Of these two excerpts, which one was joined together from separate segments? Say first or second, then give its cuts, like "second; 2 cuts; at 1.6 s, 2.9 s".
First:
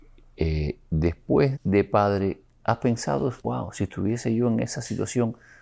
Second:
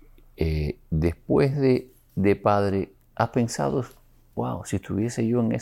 first; 2 cuts; at 1.5 s, 3.4 s